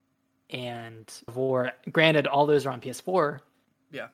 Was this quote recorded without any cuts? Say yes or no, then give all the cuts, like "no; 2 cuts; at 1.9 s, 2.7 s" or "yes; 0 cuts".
no; 1 cut; at 1.3 s